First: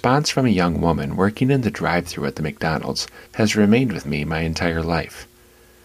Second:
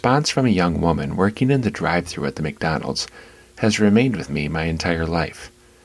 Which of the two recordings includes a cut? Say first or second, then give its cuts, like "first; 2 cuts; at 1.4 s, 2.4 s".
first; 1 cut; at 3.3 s